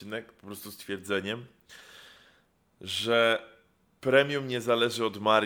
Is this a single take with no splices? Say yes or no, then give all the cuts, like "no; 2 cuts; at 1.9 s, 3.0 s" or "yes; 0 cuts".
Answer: yes; 0 cuts